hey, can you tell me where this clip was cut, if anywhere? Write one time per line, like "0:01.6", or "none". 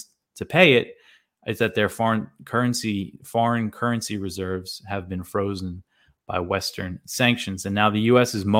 0:01.6